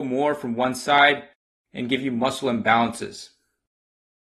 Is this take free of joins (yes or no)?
yes